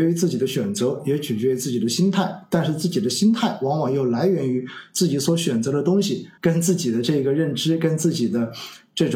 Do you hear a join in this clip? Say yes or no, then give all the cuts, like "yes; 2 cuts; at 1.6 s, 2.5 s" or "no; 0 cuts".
yes; 1 cut; at 6.4 s